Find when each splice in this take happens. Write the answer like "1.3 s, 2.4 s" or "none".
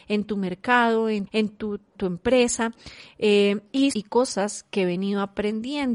1.3 s, 1.9 s, 3.9 s